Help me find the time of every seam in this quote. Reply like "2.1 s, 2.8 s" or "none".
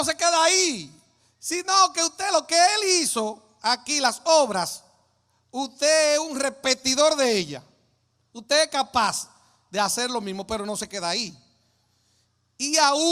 none